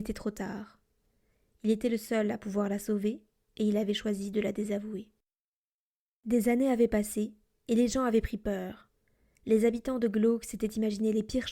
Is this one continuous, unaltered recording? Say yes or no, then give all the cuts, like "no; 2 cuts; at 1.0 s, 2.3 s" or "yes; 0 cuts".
yes; 0 cuts